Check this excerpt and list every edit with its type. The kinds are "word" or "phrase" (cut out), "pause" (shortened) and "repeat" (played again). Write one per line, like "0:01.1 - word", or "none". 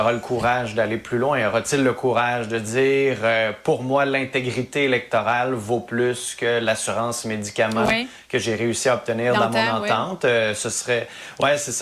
none